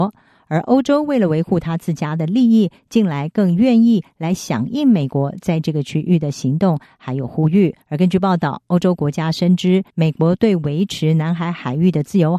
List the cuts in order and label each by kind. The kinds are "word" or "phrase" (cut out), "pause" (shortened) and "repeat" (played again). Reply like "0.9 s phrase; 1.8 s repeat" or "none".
7.8 s pause; 9.9 s pause